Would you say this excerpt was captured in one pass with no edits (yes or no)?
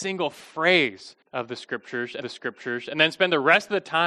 no